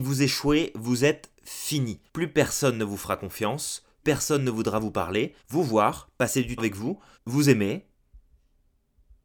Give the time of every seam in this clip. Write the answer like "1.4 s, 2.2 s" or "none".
2.1 s, 4.0 s, 5.4 s, 6.6 s, 7.1 s